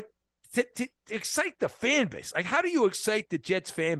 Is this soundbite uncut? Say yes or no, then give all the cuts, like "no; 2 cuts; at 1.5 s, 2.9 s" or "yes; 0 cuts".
yes; 0 cuts